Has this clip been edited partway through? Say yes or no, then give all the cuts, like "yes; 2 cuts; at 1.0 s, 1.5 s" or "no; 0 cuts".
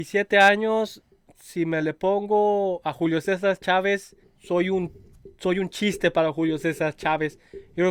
yes; 2 cuts; at 4.2 s, 5.3 s